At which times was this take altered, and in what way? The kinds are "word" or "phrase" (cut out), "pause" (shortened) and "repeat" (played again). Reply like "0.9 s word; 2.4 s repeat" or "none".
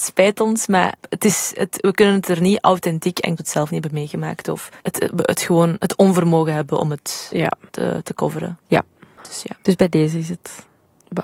3.4 s phrase; 4.8 s pause